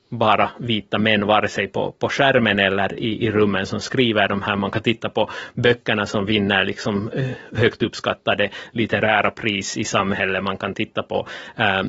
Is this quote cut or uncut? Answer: uncut